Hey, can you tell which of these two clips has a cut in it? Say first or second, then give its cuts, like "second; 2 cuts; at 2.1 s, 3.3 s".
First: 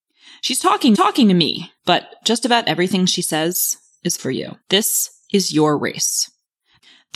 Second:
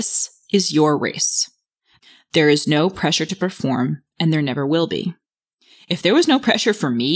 first; 4 cuts; at 0.9 s, 1.8 s, 4.2 s, 4.6 s